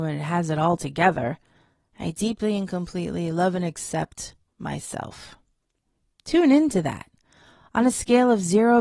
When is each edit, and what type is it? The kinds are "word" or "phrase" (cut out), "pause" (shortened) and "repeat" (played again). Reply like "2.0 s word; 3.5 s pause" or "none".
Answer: none